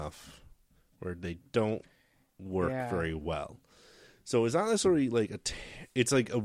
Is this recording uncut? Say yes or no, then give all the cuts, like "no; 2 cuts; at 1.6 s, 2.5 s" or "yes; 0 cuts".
yes; 0 cuts